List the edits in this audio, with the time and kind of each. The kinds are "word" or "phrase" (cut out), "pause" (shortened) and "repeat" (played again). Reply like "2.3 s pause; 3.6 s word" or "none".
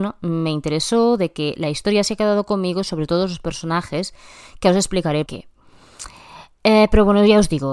5.3 s word